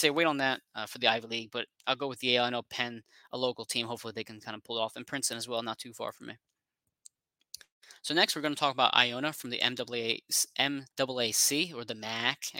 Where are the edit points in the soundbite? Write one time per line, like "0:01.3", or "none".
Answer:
0:01.8
0:10.9